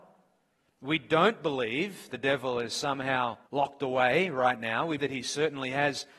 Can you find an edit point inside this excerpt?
yes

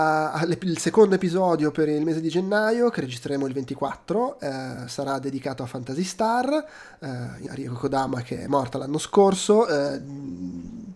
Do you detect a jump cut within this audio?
yes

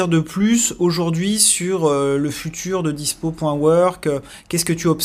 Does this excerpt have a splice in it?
no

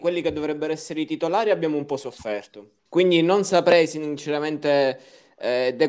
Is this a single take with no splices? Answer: no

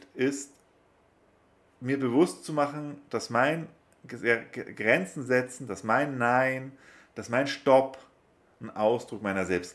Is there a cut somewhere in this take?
no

